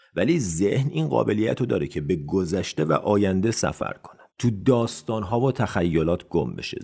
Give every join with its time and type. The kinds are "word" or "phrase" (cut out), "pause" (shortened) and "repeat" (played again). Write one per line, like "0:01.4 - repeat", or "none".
0:04.3 - pause

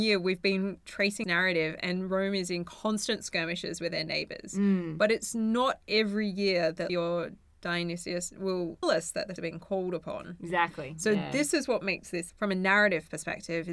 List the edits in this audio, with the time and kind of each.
0:01.2 - word
0:06.9 - word
0:08.8 - word
0:09.4 - word
0:12.3 - word

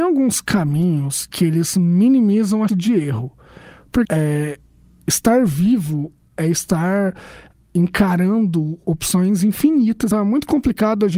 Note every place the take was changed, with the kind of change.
0:02.7 - word
0:04.0 - word
0:10.1 - word

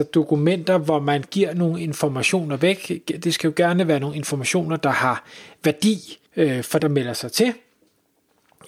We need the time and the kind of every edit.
0:06.3 - pause
0:06.8 - word

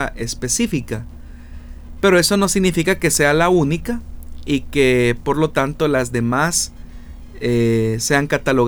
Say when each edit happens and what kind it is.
none

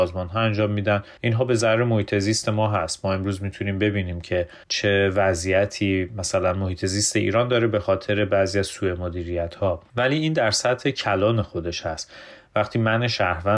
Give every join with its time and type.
0:01.2 - pause
0:04.6 - pause

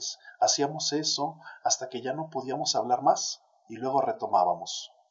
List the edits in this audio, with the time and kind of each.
none

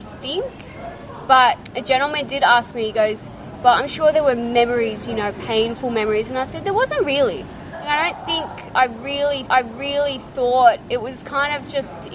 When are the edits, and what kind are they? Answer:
0:09.5 - repeat

